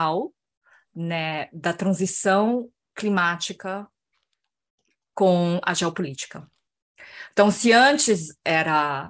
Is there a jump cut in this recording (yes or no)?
no